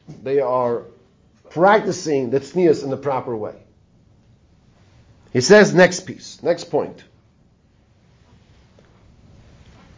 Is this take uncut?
yes; 0 cuts

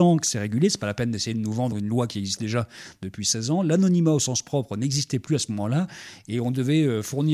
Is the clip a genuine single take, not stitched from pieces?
yes; 0 cuts

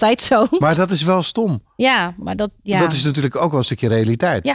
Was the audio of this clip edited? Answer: no; 0 cuts

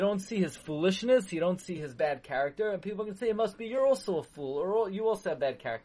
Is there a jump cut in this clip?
no; 0 cuts

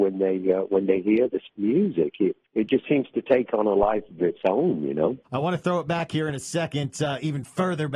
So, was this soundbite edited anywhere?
yes; 1 cut; at 5.2 s

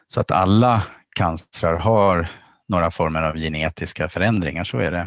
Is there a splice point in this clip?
no; 0 cuts

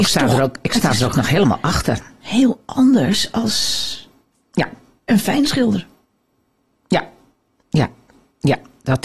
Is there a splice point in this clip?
no; 0 cuts

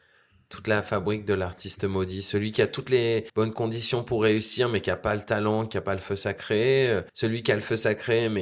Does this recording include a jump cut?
yes; 2 cuts; at 3.3 s, 7.1 s

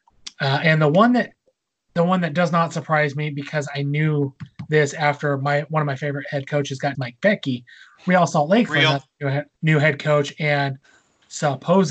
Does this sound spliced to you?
yes; 3 cuts; at 6.9 s, 8.7 s, 9.5 s

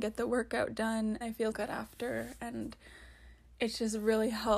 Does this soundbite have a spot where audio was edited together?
yes; 2 cuts; at 1.2 s, 1.5 s

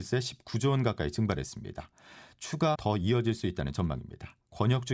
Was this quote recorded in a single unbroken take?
no; 1 cut; at 2.7 s

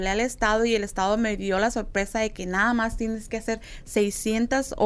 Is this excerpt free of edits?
yes; 0 cuts

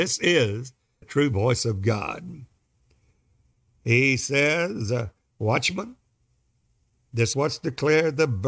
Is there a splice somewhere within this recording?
yes; 2 cuts; at 1.0 s, 7.3 s

